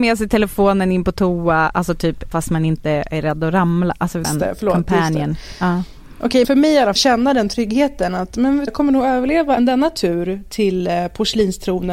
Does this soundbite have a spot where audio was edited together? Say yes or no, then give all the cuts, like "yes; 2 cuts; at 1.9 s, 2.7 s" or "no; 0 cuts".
yes; 6 cuts; at 2.3 s, 4.2 s, 6.4 s, 7.0 s, 8.7 s, 9.6 s